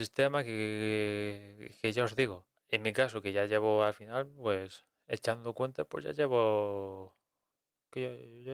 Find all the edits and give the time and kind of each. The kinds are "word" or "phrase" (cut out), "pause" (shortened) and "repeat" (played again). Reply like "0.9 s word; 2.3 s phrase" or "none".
2.6 s pause